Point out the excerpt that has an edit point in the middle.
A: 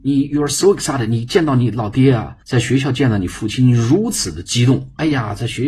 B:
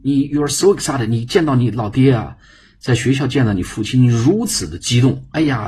A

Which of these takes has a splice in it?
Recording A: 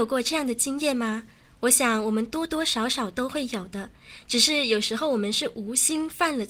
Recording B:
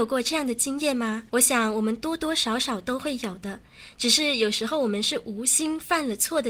B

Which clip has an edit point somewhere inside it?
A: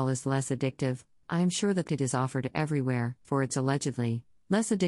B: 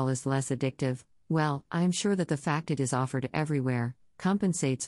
A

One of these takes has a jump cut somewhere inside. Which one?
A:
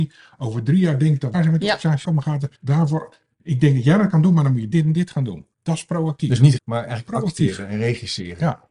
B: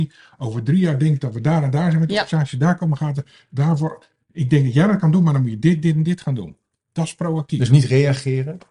A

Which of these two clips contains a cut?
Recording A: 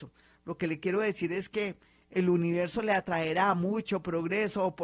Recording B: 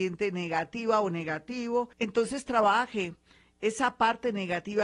B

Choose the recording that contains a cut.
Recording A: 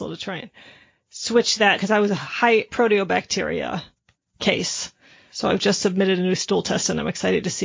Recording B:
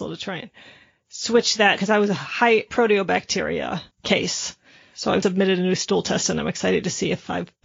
B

